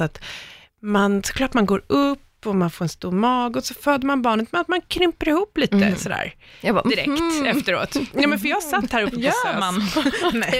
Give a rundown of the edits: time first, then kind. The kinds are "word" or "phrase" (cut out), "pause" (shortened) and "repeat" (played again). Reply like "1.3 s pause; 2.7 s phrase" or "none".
none